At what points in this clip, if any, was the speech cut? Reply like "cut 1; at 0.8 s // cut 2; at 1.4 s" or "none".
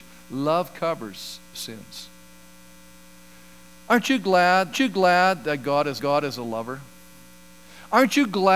cut 1; at 1.5 s // cut 2; at 4.7 s // cut 3; at 6.0 s